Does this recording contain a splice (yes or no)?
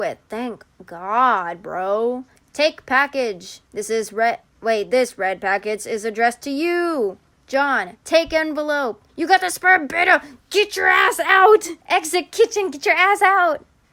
yes